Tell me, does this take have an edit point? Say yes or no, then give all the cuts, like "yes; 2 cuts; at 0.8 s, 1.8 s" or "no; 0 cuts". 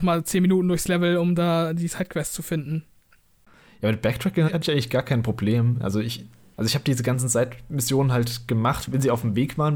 no; 0 cuts